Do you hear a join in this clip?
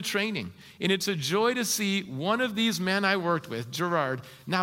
no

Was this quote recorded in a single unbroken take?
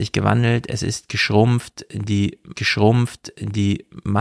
no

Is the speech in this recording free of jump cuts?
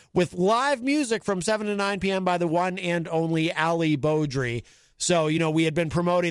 yes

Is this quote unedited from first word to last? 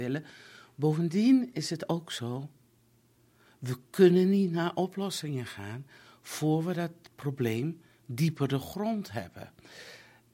yes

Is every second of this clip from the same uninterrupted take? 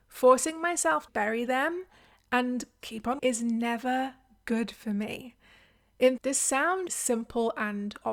no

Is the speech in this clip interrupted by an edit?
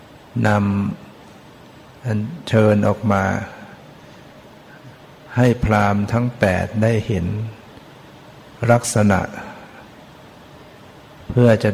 no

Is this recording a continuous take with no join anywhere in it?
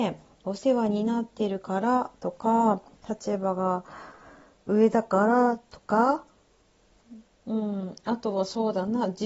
yes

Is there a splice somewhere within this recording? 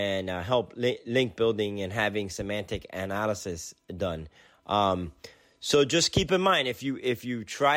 no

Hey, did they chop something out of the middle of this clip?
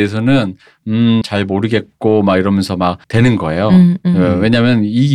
yes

